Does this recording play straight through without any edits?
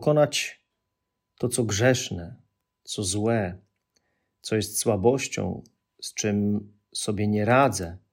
yes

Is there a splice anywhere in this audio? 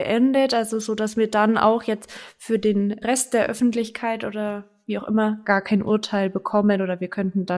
no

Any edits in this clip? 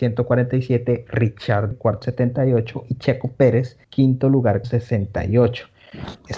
yes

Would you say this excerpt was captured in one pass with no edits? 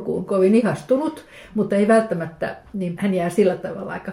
no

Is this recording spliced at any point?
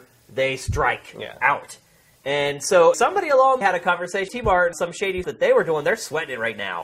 yes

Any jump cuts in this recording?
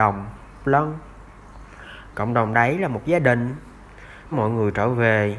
yes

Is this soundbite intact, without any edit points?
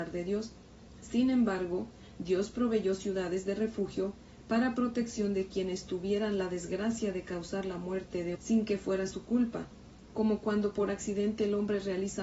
no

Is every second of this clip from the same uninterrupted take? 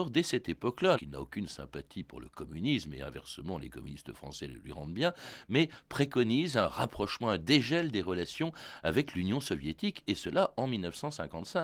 no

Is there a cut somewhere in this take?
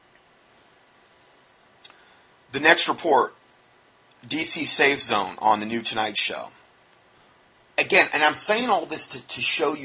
no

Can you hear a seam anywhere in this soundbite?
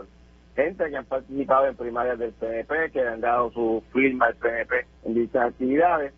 yes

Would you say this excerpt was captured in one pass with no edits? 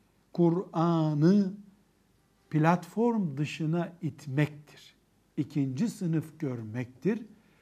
yes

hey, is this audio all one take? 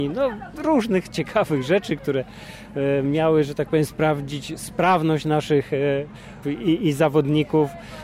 no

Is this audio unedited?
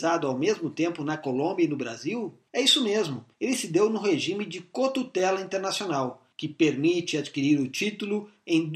no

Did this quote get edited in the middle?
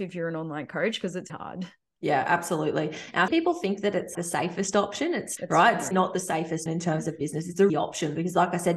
yes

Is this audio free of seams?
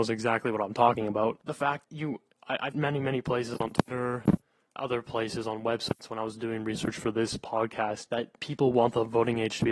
no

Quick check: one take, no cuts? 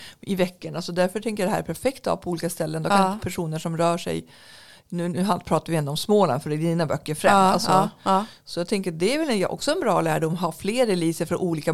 yes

